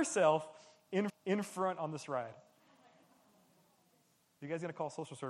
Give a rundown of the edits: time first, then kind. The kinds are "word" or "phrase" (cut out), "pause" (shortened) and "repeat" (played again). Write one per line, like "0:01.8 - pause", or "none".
0:01.1 - repeat